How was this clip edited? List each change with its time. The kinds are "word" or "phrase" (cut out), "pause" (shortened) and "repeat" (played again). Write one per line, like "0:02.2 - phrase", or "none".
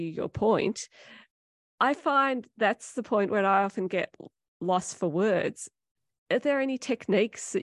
none